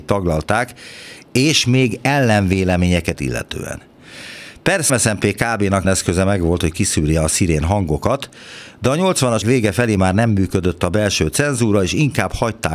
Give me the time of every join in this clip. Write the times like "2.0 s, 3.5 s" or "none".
3.1 s, 4.9 s, 5.8 s, 9.4 s